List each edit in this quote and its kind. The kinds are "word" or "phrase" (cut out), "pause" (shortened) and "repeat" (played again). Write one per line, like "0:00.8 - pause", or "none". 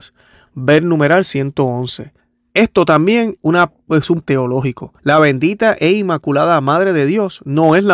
0:02.2 - pause
0:03.4 - word
0:04.2 - word
0:05.0 - pause